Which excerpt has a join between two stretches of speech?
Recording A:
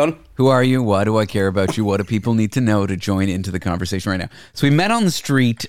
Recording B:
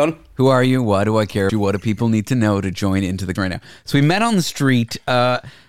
B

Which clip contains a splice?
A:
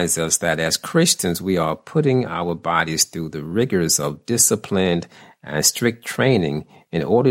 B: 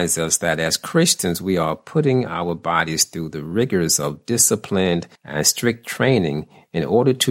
B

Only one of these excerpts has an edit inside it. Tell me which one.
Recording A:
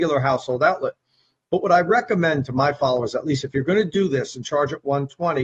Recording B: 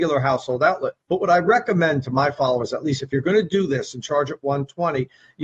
B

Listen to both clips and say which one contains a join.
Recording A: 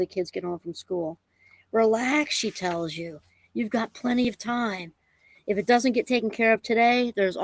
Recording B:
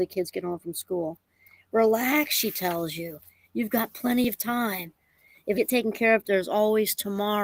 B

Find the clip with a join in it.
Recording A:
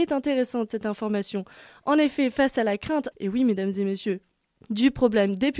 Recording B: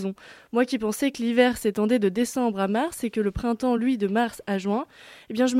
A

